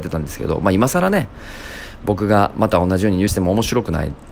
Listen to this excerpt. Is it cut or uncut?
cut